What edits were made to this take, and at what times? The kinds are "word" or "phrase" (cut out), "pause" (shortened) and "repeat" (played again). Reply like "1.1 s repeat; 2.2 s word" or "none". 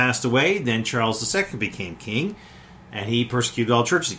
none